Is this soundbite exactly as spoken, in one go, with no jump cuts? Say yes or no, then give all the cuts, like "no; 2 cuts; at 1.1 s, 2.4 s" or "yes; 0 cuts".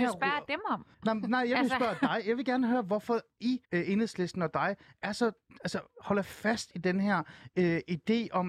no; 2 cuts; at 0.9 s, 3.6 s